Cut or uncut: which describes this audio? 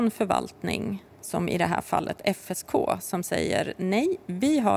cut